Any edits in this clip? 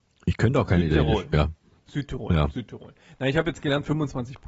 no; 0 cuts

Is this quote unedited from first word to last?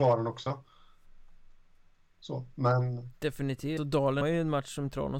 no; 2 cuts; at 3.8 s, 4.2 s

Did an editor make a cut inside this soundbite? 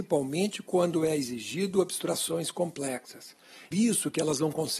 yes; 1 cut; at 3.7 s

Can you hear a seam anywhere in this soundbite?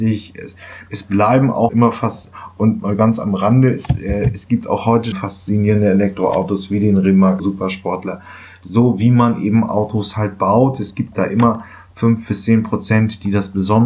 yes; 3 cuts; at 1.7 s, 5.1 s, 7.4 s

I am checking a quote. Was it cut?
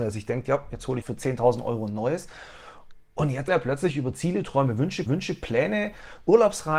yes; 3 cuts; at 1.0 s, 3.5 s, 5.1 s

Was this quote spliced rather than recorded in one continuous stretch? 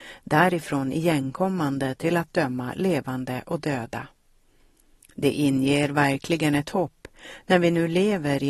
no; 0 cuts

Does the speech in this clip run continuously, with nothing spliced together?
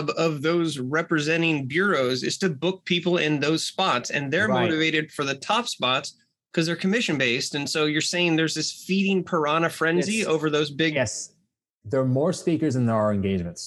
yes; 0 cuts

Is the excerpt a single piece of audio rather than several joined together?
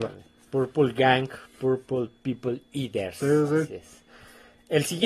yes; 0 cuts

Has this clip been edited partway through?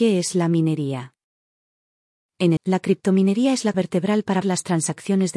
yes; 3 cuts; at 2.6 s, 3.7 s, 4.4 s

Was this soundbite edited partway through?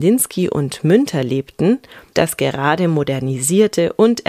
yes; 1 cut; at 2.1 s

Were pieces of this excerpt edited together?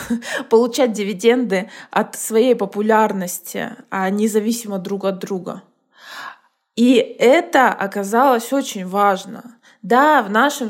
no; 0 cuts

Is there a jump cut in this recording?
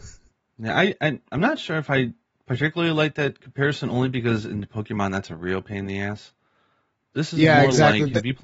yes; 1 cut; at 1.0 s

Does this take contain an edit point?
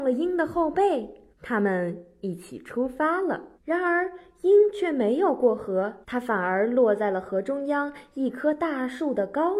yes; 3 cuts; at 1.3 s, 3.6 s, 6.0 s

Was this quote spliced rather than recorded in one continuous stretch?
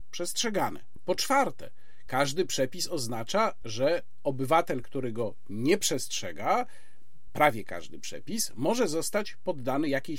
no; 0 cuts

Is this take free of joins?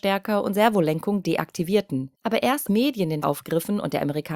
no; 3 cuts; at 2.1 s, 2.7 s, 3.2 s

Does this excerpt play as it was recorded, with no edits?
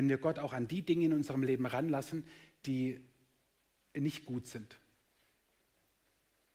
yes; 0 cuts

